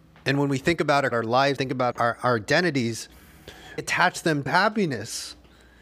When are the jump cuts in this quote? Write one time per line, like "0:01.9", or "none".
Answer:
0:01.1
0:01.6
0:01.9
0:03.8
0:04.5